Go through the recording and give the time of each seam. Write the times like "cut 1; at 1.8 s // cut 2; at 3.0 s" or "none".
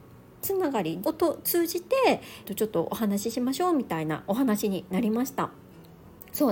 cut 1; at 1.0 s // cut 2; at 2.4 s